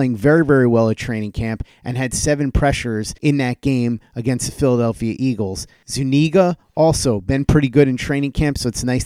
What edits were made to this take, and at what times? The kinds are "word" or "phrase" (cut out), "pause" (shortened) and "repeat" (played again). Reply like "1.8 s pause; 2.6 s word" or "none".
3.2 s pause